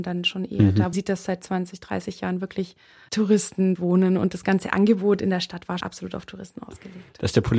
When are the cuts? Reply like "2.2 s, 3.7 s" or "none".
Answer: 0.9 s, 3.1 s, 3.8 s, 5.8 s